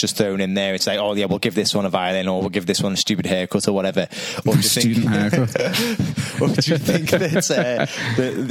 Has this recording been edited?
no; 0 cuts

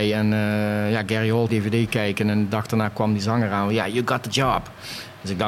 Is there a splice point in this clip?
yes; 1 cut; at 1.5 s

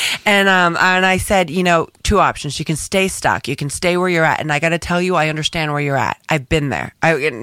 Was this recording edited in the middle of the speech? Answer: no; 0 cuts

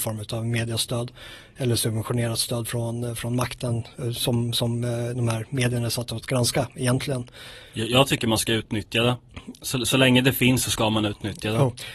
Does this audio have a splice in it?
no; 0 cuts

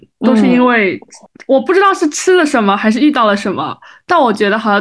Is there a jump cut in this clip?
no; 0 cuts

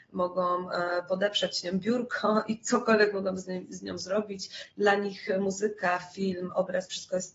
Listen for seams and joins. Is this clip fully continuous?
yes; 0 cuts

